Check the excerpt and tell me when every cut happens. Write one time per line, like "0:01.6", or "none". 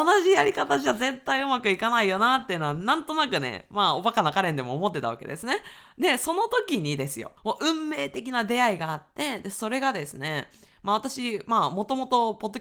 0:07.4